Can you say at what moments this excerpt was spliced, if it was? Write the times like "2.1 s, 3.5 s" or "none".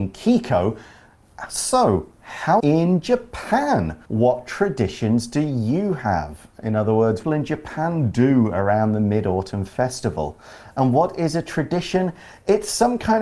2.6 s, 4.0 s, 7.2 s